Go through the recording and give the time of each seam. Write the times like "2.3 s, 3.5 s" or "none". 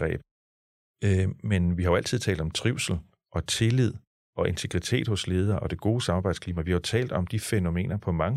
none